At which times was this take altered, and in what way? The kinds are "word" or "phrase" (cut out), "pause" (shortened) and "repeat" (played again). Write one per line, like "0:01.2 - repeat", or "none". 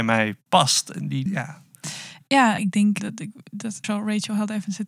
0:01.3 - word
0:02.6 - phrase
0:03.0 - word
0:03.8 - word

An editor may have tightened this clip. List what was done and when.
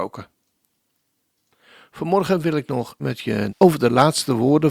0:03.0 - word
0:03.5 - word

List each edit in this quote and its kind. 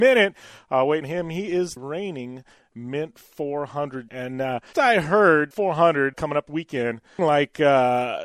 0:01.0 - word
0:01.8 - word
0:04.1 - word
0:04.7 - word
0:05.5 - word
0:06.1 - word
0:06.5 - word
0:07.2 - word

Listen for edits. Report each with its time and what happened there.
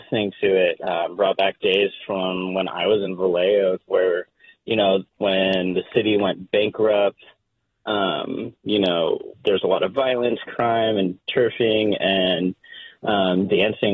0:03.1 - phrase
0:03.9 - word
0:05.1 - pause
0:09.3 - pause

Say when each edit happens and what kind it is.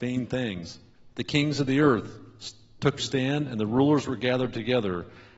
0:01.1 - pause
0:03.0 - word

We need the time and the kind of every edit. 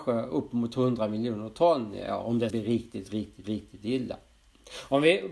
0:02.5 - word
0:03.4 - repeat

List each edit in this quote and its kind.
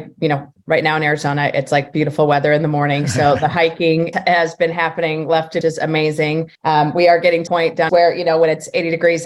0:04.1 - word
0:05.6 - phrase
0:06.5 - pause
0:07.5 - word
0:07.9 - phrase

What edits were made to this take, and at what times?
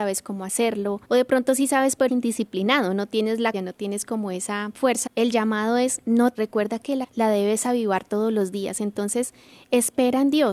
0:01.0 - pause
0:02.1 - word
0:03.5 - word
0:05.1 - phrase
0:06.3 - word
0:07.0 - word

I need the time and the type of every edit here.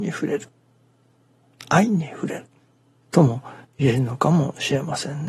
none

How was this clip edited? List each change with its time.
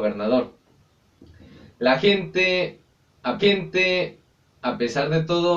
0:03.4 - repeat

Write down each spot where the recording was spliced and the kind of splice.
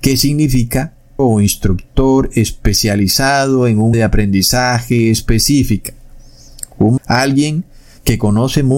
0:01.2 - word
0:03.9 - word
0:07.0 - word

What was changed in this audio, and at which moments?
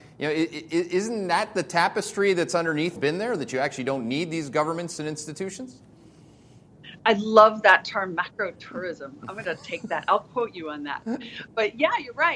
0:03.0 - phrase

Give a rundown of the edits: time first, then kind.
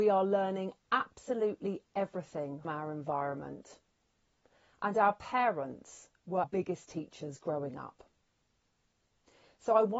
0:02.6 - word
0:06.4 - word

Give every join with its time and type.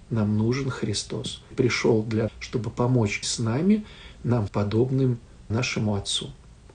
0:01.5 - word
0:02.3 - word
0:03.2 - word
0:04.5 - word
0:05.5 - word

